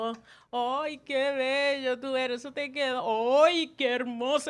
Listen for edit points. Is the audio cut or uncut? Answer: uncut